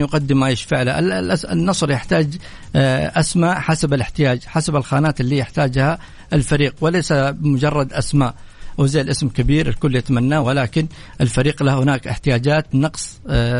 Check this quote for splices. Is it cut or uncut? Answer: uncut